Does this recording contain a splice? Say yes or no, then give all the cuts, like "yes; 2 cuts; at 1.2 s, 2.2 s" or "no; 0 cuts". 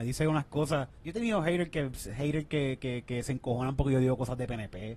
yes; 1 cut; at 1.0 s